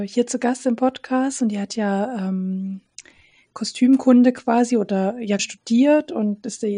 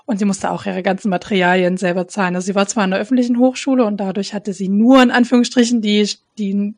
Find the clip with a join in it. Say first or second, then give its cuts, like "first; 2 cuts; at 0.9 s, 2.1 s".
first; 1 cut; at 5.4 s